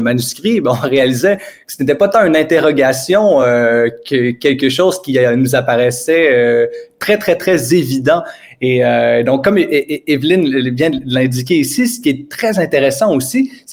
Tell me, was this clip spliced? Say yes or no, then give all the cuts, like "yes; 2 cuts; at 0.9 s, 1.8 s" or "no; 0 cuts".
no; 0 cuts